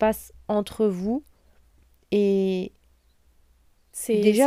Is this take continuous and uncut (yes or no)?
yes